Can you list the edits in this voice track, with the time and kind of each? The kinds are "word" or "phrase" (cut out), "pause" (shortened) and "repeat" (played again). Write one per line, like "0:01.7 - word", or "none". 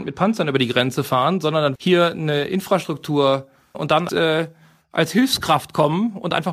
0:01.8 - phrase
0:03.7 - word
0:04.1 - word